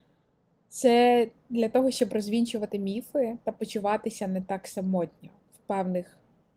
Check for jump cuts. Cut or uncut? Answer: uncut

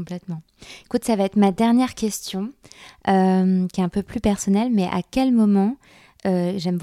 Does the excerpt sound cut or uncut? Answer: uncut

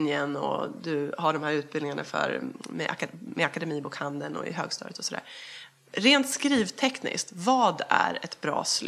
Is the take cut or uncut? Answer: uncut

